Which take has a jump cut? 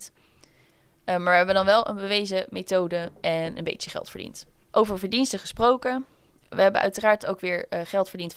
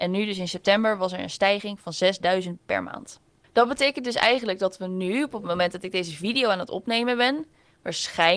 second; 1 cut; at 2.6 s

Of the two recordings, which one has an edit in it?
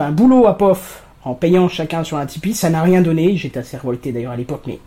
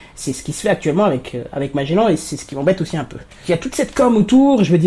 second; 1 cut; at 3.4 s

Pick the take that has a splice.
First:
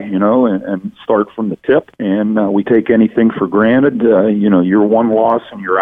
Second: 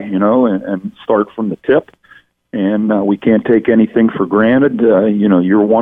first; 2 cuts; at 1.9 s, 2.6 s

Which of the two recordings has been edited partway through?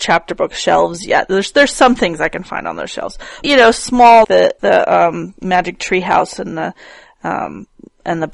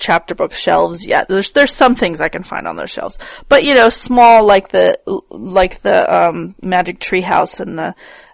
first; 3 cuts; at 3.4 s, 4.2 s, 4.6 s

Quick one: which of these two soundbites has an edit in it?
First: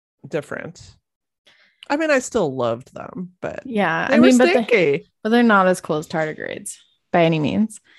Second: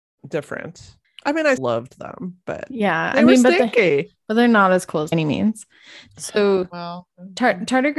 second; 3 cuts; at 1.0 s, 1.6 s, 5.1 s

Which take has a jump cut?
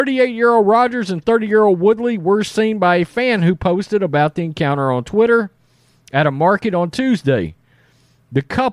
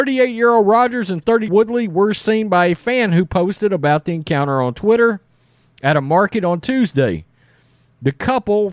second; 1 cut; at 1.5 s

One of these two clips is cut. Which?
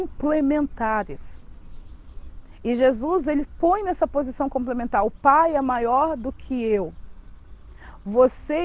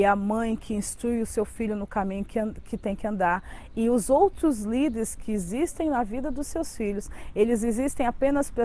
first; 1 cut; at 3.4 s

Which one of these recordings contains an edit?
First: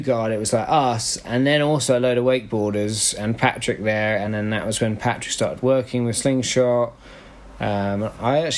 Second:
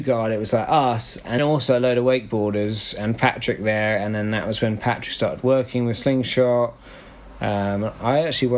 second; 1 cut; at 1.4 s

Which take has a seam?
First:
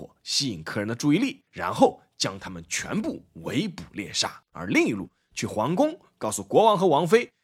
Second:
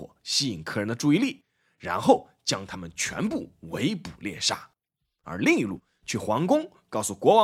first; 2 cuts; at 1.5 s, 4.4 s

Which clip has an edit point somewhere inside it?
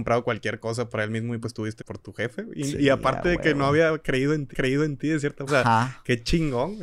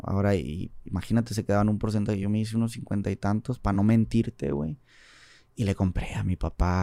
first; 3 cuts; at 1.8 s, 4.5 s, 5.5 s

